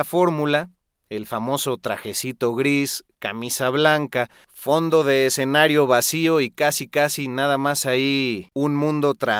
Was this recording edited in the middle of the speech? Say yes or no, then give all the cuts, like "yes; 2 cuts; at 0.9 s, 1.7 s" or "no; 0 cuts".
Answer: no; 0 cuts